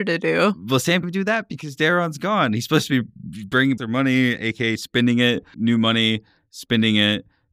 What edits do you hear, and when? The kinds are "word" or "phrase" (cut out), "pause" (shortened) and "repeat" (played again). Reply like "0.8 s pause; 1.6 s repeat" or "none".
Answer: 1.0 s word; 3.8 s word; 5.5 s word